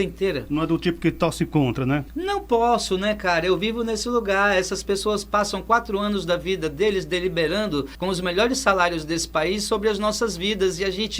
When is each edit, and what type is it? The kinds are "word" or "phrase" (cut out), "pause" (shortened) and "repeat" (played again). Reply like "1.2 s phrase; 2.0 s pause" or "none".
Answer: none